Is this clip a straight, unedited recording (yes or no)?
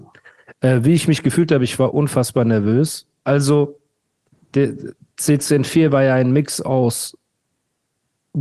yes